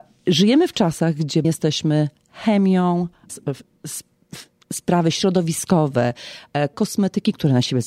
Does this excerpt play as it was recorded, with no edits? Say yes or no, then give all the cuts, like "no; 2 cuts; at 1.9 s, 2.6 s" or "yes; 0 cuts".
no; 3 cuts; at 1.4 s, 3.3 s, 6.7 s